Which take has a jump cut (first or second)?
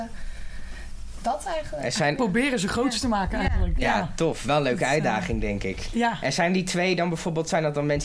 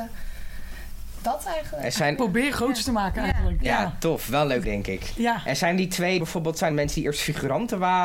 second